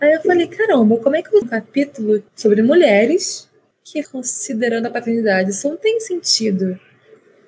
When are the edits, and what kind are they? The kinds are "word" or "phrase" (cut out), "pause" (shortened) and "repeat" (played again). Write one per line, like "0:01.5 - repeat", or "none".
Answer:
0:01.4 - word
0:02.3 - pause
0:04.0 - word